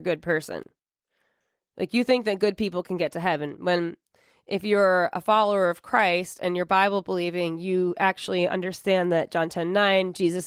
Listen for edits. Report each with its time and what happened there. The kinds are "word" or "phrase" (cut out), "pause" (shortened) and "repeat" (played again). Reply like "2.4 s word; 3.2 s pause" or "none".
none

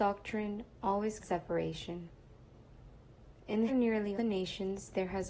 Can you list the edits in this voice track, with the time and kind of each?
1.2 s phrase; 3.7 s word; 4.1 s word

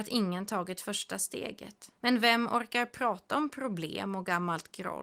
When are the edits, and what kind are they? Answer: 2.0 s pause

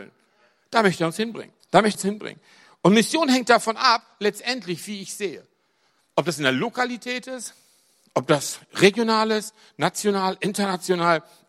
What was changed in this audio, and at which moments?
1.6 s pause; 1.9 s word

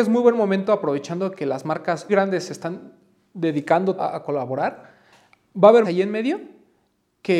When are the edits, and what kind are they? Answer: 2.1 s word; 4.0 s word; 5.8 s word

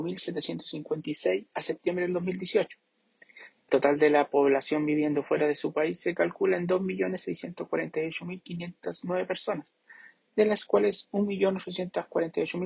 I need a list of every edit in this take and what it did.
3.7 s word

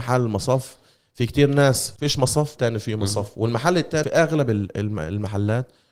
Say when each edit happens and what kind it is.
2.0 s pause; 2.6 s phrase; 4.0 s phrase

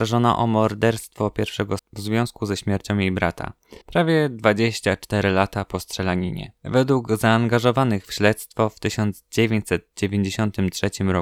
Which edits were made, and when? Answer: 1.8 s word; 3.8 s pause; 6.6 s pause

